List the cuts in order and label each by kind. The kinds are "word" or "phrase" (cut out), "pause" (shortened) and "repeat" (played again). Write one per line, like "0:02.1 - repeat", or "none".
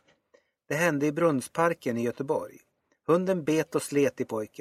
none